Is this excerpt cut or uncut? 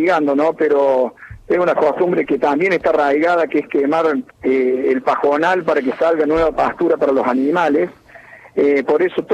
cut